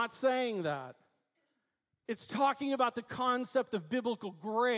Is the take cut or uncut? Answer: uncut